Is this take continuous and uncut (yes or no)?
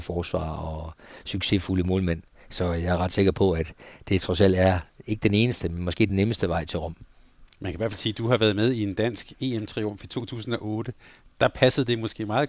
yes